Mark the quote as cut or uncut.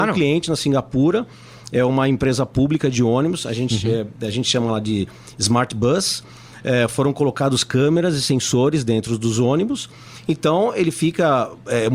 uncut